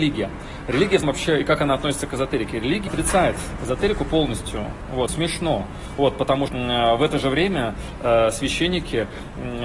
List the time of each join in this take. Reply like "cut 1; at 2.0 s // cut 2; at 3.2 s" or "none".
cut 1; at 1.0 s // cut 2; at 2.9 s // cut 3; at 5.1 s // cut 4; at 6.5 s